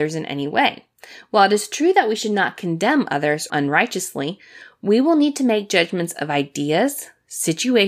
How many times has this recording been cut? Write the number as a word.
one